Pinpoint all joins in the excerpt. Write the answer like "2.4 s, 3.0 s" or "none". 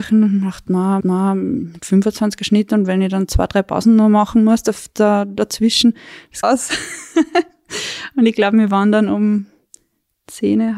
1.0 s, 6.4 s